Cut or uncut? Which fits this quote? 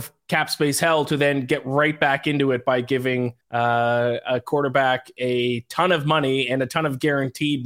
cut